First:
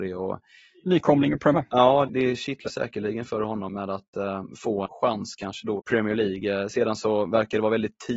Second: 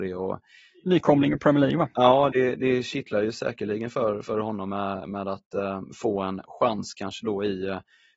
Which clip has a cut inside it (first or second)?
first